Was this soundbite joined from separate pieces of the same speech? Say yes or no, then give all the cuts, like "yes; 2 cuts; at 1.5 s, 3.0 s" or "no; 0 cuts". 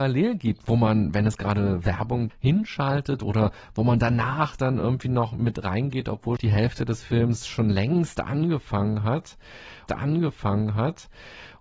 yes; 3 cuts; at 2.3 s, 6.4 s, 9.9 s